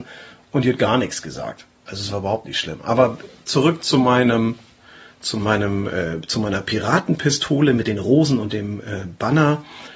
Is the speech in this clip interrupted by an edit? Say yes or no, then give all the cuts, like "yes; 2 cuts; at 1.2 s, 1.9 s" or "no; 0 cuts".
no; 0 cuts